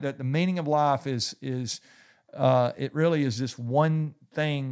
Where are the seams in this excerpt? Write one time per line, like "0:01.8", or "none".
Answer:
none